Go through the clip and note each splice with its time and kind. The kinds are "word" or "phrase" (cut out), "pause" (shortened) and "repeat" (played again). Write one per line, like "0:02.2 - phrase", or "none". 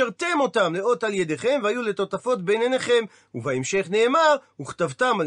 none